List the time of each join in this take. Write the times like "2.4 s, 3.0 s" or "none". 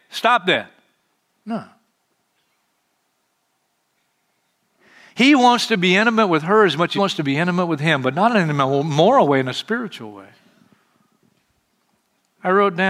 7.0 s